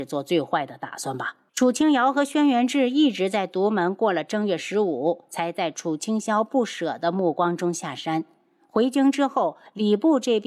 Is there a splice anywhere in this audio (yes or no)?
yes